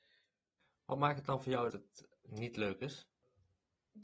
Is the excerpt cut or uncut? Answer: cut